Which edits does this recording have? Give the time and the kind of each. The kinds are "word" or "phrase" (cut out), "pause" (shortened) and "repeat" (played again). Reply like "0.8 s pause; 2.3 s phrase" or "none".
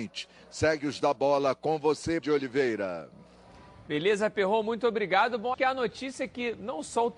1.0 s word; 2.2 s word; 5.5 s word